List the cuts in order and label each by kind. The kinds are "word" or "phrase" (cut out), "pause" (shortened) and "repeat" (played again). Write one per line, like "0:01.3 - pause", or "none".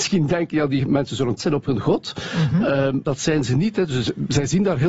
0:01.4 - word
0:03.0 - word